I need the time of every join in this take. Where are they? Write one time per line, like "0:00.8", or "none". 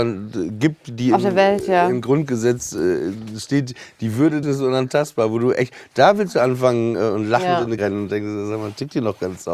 0:04.4
0:07.8